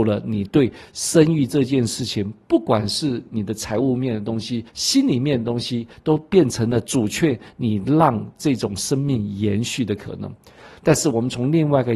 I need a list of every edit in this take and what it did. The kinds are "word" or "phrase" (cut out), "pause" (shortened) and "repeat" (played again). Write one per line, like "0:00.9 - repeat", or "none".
0:04.7 - pause